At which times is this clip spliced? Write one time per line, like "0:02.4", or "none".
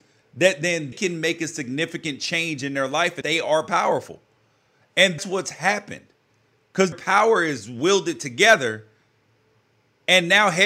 0:00.9
0:03.2
0:05.2
0:06.9